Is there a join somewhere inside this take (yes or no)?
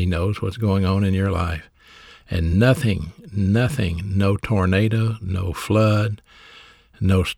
no